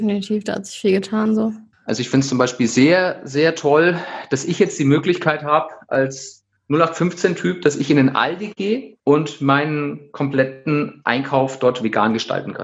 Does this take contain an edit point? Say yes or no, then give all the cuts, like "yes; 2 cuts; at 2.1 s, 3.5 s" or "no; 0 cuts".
yes; 3 cuts; at 1.7 s, 6.6 s, 9.0 s